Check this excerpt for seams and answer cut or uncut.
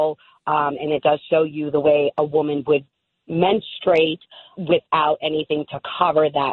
cut